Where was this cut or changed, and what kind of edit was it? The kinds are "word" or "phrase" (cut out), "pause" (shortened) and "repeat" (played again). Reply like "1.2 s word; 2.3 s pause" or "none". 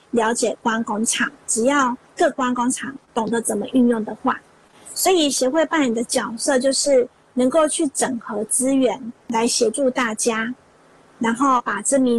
3.0 s pause